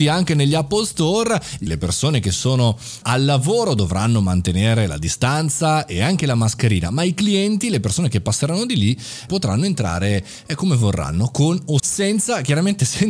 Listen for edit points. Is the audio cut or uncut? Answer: cut